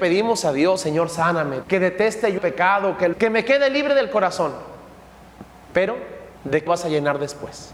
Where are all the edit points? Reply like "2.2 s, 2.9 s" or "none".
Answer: 1.6 s, 2.4 s, 3.1 s, 6.4 s, 6.7 s